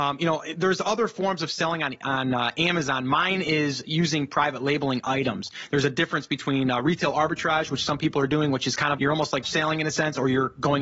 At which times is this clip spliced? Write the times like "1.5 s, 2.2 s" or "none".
9.0 s, 9.4 s